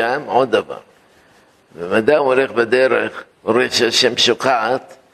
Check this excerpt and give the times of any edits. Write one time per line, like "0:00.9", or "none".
0:03.3

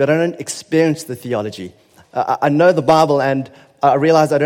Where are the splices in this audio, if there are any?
none

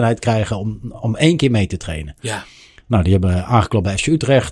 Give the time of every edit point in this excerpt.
none

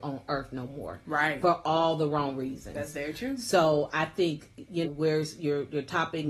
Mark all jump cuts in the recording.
0:04.8

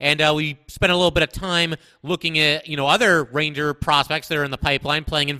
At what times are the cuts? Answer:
none

